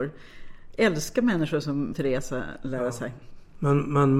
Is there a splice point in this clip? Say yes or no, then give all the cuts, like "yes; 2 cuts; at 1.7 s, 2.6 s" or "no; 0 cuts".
yes; 1 cut; at 1.9 s